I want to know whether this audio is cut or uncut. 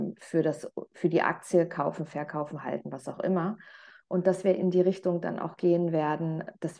uncut